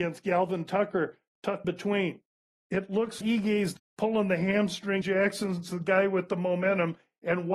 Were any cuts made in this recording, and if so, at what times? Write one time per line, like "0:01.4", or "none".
0:01.6
0:03.2
0:03.8
0:05.0